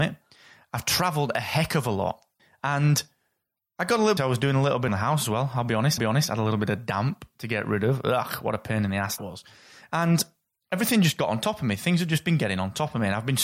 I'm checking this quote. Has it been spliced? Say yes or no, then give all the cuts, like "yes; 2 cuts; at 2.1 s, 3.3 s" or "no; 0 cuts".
yes; 5 cuts; at 2.4 s, 4.2 s, 4.9 s, 6.0 s, 9.2 s